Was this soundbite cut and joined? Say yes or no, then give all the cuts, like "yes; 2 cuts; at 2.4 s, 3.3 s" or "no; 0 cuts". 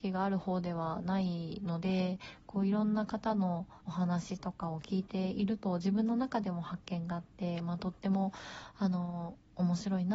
yes; 1 cut; at 3.8 s